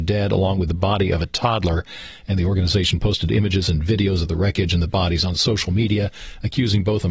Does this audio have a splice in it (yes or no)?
no